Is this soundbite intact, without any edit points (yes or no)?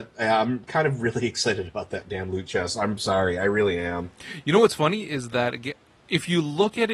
yes